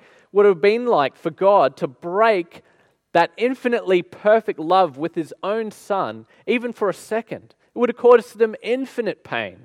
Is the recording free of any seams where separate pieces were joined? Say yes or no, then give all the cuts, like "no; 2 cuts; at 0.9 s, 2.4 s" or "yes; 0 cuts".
yes; 0 cuts